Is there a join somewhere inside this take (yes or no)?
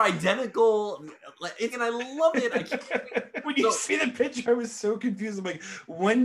yes